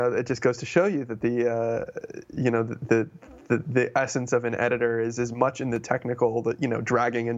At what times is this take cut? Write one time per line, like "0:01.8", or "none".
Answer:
none